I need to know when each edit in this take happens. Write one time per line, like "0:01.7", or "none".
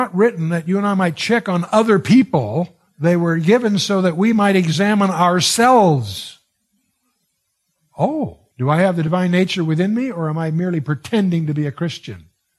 0:02.9
0:08.5